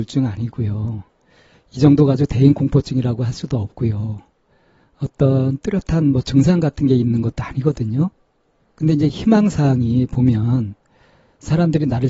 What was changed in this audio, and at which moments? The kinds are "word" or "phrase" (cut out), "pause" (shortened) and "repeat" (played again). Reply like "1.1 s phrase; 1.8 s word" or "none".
8.6 s pause